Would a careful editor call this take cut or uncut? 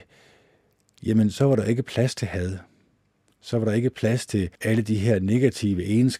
cut